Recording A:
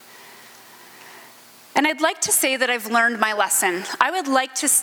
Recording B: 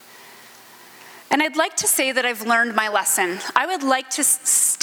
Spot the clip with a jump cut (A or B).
B